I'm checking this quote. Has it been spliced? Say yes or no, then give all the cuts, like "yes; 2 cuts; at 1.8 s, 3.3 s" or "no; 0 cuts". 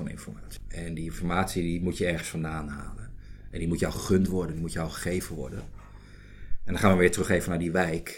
no; 0 cuts